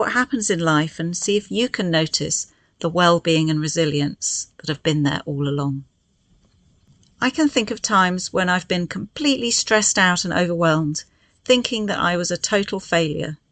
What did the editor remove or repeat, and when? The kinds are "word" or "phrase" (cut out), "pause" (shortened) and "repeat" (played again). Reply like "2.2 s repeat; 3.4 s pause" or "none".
none